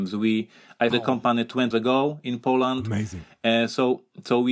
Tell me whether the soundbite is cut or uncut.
cut